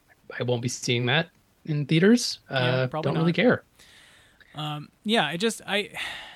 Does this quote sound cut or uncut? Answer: uncut